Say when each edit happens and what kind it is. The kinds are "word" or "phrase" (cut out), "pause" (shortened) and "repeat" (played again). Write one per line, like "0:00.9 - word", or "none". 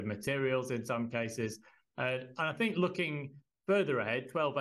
none

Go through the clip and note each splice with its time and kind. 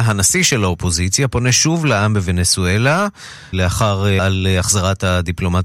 0:03.5 - word
0:04.2 - word

